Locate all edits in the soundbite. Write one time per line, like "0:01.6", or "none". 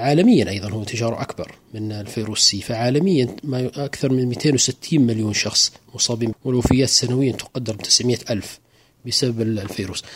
0:06.3